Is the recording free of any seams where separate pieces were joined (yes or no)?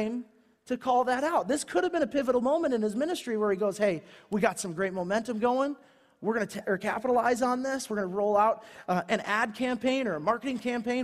yes